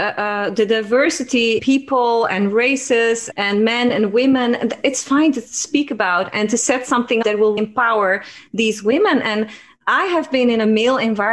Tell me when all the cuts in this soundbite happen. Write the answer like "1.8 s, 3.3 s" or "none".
1.6 s, 3.3 s, 7.2 s, 7.6 s